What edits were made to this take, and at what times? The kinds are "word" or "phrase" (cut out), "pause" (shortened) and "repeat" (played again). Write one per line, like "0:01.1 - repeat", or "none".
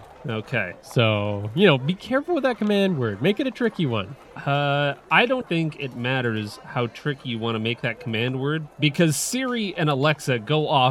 0:05.4 - word

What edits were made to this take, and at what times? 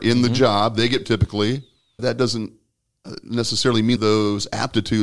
0:01.0 - word
0:02.0 - word
0:04.0 - phrase

